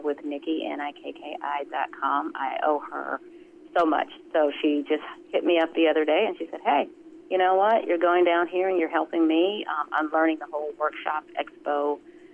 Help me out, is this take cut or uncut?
uncut